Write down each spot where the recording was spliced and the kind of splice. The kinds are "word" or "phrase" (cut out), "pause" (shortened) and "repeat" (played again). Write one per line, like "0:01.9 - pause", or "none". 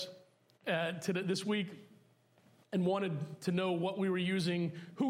none